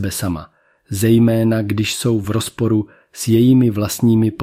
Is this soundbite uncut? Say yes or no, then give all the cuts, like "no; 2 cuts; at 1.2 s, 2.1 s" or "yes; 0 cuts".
yes; 0 cuts